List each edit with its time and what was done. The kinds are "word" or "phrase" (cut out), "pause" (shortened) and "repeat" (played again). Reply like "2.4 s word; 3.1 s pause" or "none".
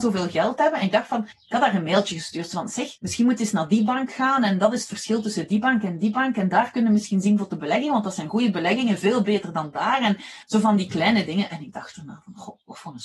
1.3 s pause; 3.0 s pause; 10.4 s pause

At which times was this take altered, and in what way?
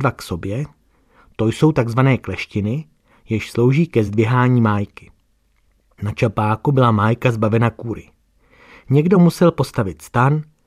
none

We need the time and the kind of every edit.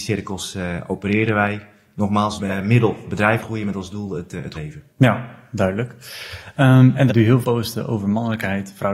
2.4 s phrase; 3.4 s word; 4.5 s word; 4.9 s pause; 7.1 s word; 7.4 s word

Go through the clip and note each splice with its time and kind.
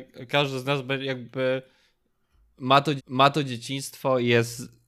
3.0 s repeat

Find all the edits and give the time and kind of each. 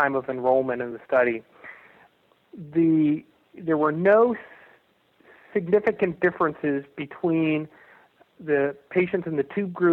none

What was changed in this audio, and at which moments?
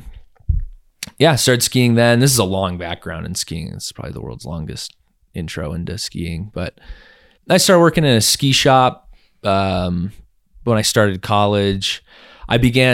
7.4 s word

